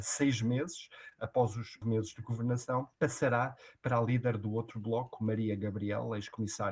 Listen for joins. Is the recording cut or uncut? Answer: cut